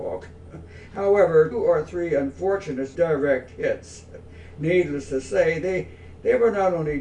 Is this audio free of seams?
no; 2 cuts; at 1.5 s, 2.9 s

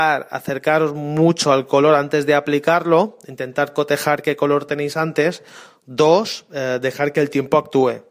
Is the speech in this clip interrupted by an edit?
no; 0 cuts

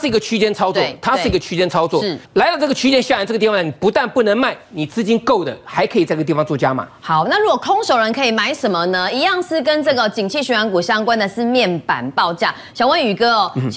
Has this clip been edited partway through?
yes; 1 cut; at 2.2 s

